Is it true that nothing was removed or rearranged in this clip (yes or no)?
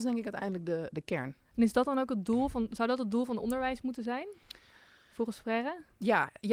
yes